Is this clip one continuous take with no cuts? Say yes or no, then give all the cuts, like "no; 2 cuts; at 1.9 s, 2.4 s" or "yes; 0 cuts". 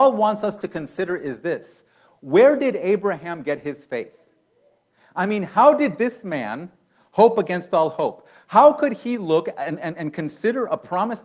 yes; 0 cuts